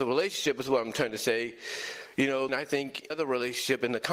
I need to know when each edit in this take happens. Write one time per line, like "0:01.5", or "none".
0:02.5
0:03.1